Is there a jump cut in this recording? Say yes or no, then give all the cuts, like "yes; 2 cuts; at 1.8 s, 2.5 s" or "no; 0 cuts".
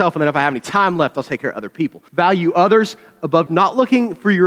yes; 2 cuts; at 2.1 s, 3.5 s